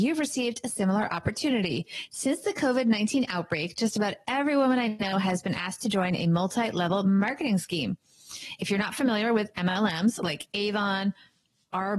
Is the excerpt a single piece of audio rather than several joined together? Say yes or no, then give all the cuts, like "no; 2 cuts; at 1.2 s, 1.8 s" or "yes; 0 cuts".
yes; 0 cuts